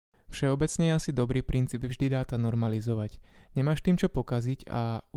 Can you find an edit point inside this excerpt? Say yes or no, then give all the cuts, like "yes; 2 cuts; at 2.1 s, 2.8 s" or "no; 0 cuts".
no; 0 cuts